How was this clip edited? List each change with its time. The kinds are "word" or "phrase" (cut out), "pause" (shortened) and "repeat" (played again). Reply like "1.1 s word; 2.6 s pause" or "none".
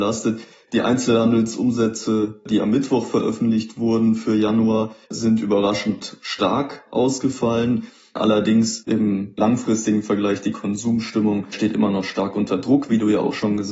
5.0 s pause